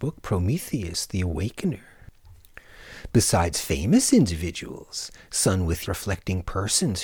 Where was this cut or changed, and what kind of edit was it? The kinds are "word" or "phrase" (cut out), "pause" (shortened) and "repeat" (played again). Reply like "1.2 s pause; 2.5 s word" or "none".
5.8 s word